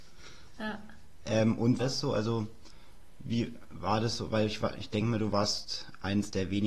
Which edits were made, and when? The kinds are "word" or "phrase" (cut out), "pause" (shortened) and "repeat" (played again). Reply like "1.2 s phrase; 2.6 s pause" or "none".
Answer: 1.8 s phrase